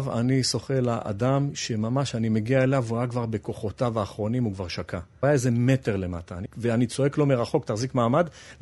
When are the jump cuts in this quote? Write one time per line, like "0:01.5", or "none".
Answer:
none